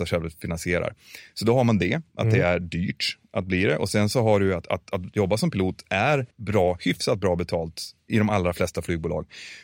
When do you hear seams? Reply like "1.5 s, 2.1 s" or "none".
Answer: 6.3 s